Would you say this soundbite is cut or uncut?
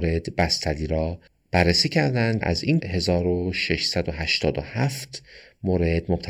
cut